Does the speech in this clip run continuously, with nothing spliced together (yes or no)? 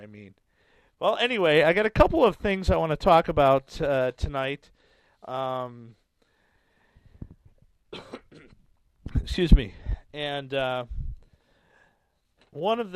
yes